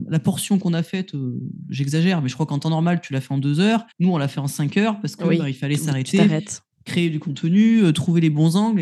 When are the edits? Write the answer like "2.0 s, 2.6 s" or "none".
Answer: 3.9 s